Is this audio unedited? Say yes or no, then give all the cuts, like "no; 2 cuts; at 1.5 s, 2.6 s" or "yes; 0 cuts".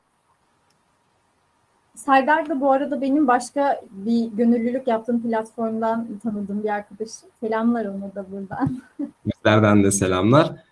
no; 1 cut; at 7.4 s